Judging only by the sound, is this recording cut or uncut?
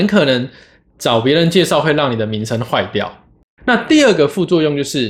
uncut